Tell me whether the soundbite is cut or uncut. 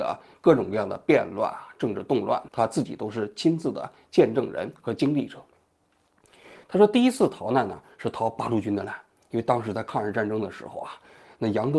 cut